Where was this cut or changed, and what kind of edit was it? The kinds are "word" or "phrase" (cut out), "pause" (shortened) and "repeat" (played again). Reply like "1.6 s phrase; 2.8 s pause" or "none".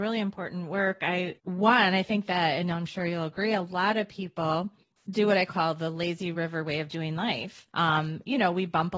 none